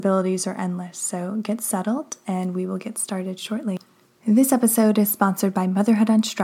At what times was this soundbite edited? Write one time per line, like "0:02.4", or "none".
none

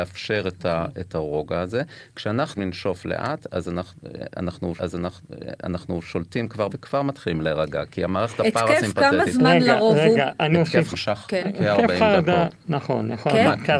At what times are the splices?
0:02.6
0:04.8
0:06.7
0:10.5
0:10.9

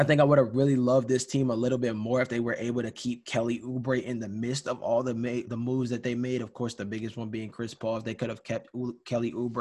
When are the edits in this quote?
0:05.5

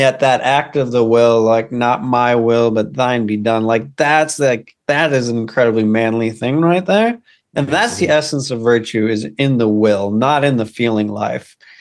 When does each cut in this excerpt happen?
none

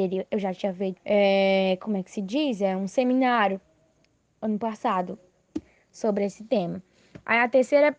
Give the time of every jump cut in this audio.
0:01.0

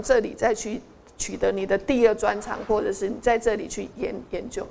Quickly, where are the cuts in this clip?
none

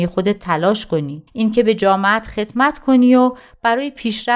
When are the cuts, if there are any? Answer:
0:01.3

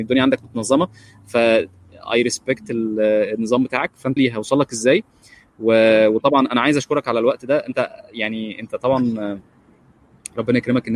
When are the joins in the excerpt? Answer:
0:04.2

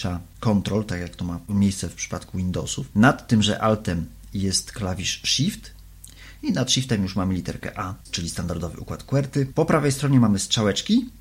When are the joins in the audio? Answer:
0:08.0

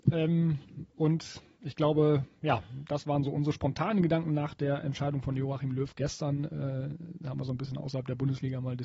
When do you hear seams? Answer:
none

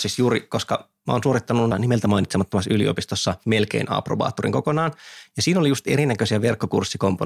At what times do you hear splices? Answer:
0:01.7

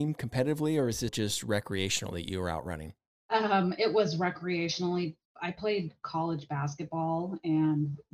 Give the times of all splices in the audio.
0:01.1
0:03.1

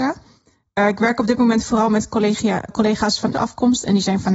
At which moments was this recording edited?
0:02.7
0:03.3

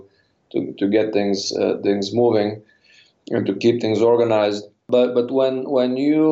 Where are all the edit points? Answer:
none

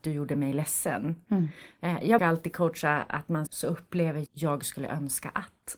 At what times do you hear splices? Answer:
0:02.2
0:03.5
0:04.3

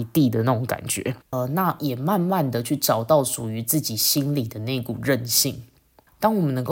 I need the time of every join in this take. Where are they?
0:01.2

